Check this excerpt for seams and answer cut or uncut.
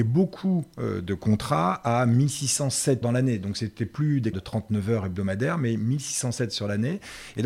cut